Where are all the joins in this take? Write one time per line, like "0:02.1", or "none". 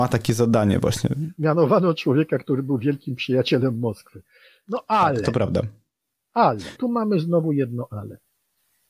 0:06.8